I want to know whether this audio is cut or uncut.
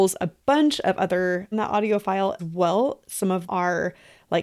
cut